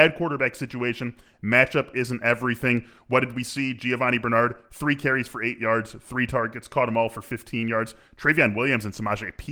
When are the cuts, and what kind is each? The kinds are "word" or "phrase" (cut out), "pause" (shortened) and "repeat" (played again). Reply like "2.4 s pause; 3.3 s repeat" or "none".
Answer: none